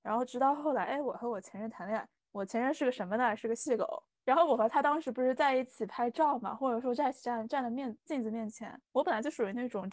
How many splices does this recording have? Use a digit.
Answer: 1